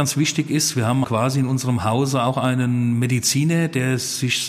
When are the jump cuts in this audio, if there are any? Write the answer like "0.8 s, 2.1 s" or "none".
1.0 s